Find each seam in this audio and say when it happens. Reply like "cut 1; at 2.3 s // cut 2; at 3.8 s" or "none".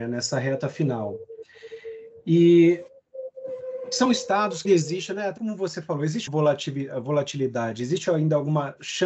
cut 1; at 4.6 s // cut 2; at 5.4 s // cut 3; at 6.3 s

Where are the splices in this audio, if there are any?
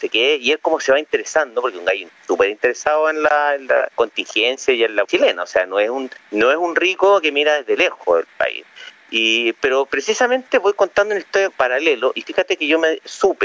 cut 1; at 3.9 s // cut 2; at 5.0 s // cut 3; at 6.2 s // cut 4; at 11.5 s

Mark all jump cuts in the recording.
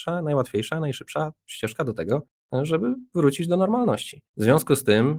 cut 1; at 4.3 s

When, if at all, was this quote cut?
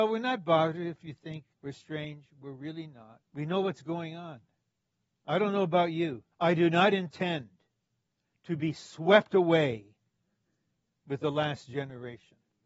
cut 1; at 1.5 s // cut 2; at 3.2 s // cut 3; at 4.6 s // cut 4; at 6.3 s

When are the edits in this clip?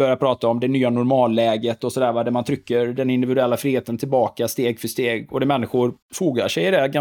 cut 1; at 6.0 s

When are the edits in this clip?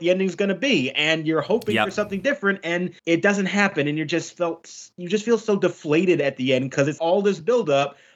cut 1; at 3.0 s // cut 2; at 7.0 s

